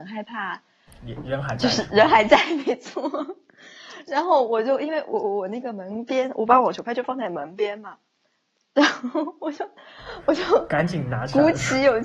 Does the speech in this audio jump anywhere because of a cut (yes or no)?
no